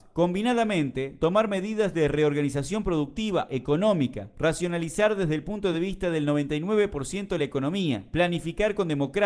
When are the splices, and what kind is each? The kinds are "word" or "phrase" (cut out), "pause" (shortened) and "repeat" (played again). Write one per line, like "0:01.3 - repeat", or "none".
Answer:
none